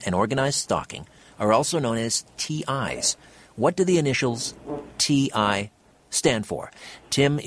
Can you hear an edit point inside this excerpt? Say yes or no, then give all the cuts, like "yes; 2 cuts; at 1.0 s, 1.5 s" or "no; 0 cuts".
no; 0 cuts